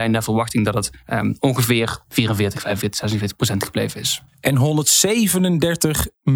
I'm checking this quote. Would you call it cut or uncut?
cut